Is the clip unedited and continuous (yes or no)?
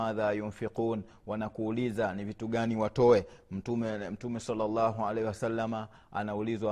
yes